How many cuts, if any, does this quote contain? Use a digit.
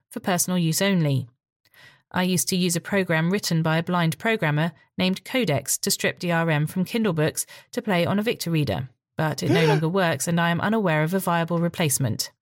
0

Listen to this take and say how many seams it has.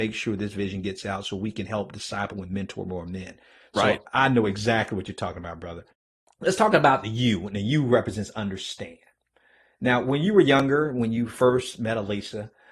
0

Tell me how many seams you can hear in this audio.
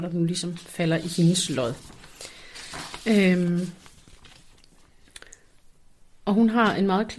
0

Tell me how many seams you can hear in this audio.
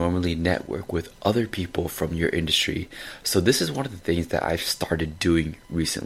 0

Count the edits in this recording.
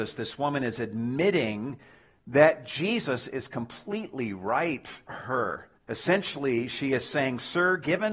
2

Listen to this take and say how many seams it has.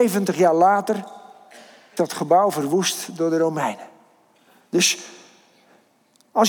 1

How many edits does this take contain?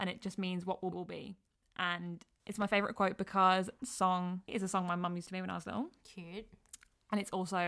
4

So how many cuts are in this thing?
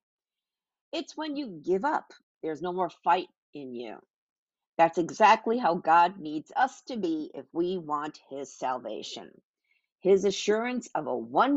0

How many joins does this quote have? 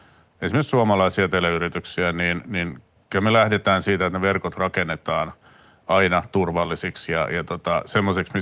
0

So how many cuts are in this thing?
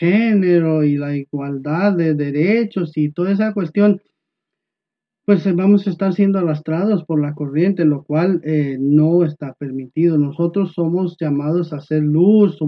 0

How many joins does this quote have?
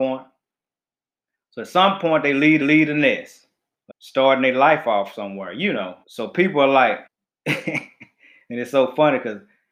4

